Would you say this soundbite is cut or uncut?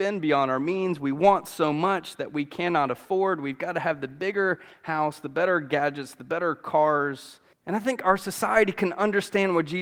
cut